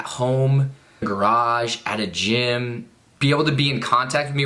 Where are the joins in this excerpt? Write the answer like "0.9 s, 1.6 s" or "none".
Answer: 1.0 s, 3.2 s